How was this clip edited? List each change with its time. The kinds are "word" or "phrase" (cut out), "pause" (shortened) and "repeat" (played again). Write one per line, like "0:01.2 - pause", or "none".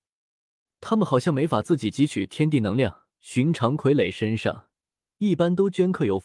0:03.1 - pause